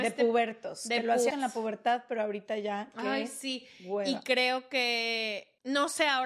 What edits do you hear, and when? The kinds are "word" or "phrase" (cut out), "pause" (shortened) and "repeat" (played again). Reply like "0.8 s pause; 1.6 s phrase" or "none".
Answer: 1.3 s word

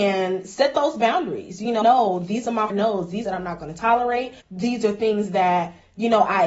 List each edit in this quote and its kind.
1.8 s phrase; 2.7 s word; 3.2 s phrase; 4.4 s pause

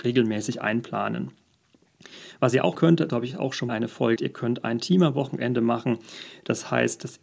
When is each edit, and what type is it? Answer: 2.7 s word; 3.1 s word; 3.7 s word; 4.2 s word

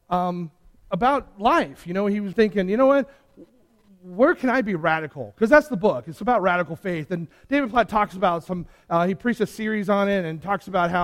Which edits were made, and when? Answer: 2.3 s word

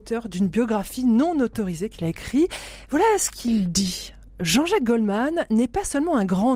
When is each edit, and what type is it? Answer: none

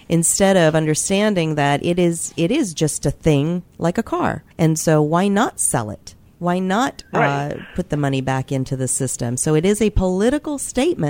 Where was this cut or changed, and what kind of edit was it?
4.5 s pause

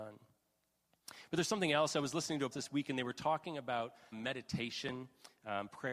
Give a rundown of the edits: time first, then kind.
2.5 s word; 4.1 s word

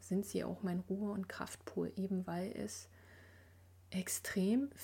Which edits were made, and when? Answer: none

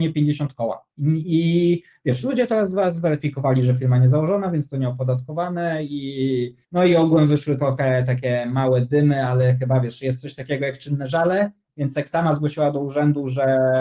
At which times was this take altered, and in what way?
0.9 s pause; 6.6 s pause

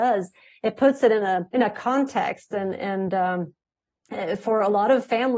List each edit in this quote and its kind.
1.5 s pause

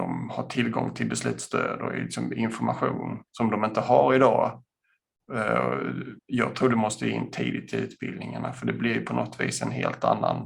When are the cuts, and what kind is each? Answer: 3.3 s pause; 6.2 s pause

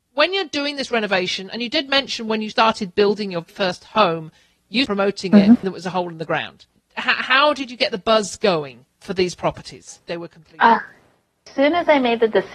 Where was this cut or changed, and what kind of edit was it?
2.5 s word; 3.5 s word; 4.8 s word; 5.6 s word; 9.0 s word; 10.1 s word

